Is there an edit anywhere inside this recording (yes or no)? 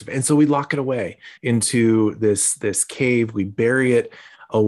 yes